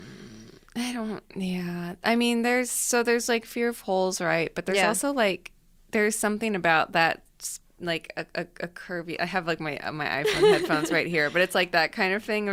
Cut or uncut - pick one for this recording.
uncut